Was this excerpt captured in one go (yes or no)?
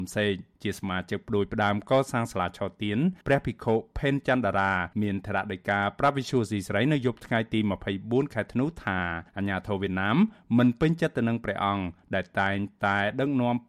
no